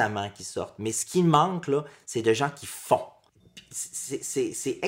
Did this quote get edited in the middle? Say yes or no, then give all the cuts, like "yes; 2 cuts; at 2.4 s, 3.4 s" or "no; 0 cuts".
no; 0 cuts